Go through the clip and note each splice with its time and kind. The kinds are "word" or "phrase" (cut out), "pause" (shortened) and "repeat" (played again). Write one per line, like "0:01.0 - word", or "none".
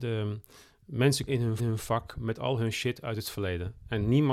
0:01.3 - word
0:01.6 - repeat